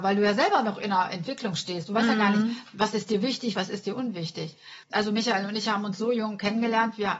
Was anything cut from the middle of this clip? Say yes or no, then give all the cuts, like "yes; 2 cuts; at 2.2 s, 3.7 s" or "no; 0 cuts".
yes; 1 cut; at 4.8 s